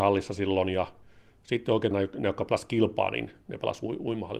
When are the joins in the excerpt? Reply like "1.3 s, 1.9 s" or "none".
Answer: 1.9 s